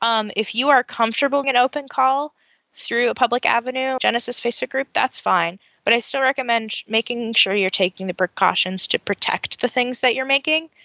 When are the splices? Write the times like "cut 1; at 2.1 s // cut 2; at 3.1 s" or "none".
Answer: cut 1; at 1.4 s // cut 2; at 4.0 s